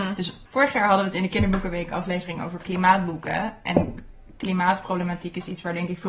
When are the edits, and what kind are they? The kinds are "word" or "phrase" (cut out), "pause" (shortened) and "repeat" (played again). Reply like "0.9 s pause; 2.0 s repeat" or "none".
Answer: none